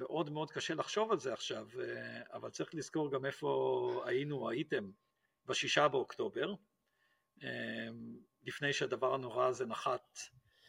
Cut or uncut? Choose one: uncut